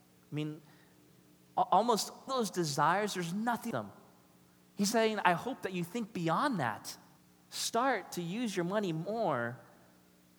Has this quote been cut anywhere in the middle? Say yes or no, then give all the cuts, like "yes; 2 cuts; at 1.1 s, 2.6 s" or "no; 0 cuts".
yes; 4 cuts; at 2.3 s, 3.7 s, 4.9 s, 7.2 s